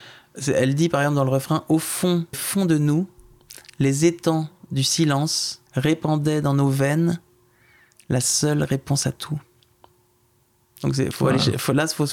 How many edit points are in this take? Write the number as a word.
two